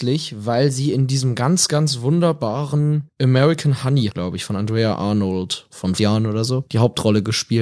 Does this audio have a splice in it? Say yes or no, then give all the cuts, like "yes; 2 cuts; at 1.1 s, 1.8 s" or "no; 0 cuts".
yes; 2 cuts; at 4.1 s, 6.0 s